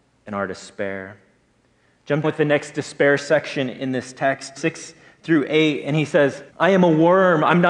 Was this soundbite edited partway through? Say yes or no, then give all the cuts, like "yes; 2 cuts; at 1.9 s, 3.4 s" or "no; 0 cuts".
yes; 3 cuts; at 2.2 s, 4.6 s, 6.5 s